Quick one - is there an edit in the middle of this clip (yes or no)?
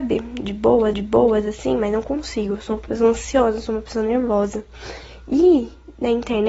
yes